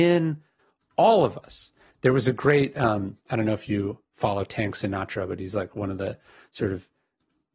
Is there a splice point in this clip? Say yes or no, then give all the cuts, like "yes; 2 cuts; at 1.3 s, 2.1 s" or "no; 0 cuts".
no; 0 cuts